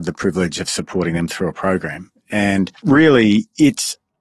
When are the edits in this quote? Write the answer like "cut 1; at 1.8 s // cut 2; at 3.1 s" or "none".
cut 1; at 2.7 s